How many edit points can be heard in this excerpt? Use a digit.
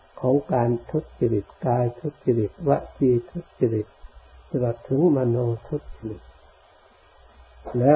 1